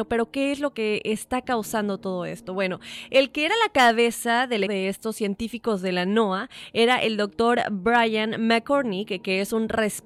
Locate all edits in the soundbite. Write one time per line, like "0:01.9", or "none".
0:04.7